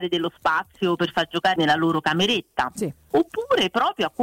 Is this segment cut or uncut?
cut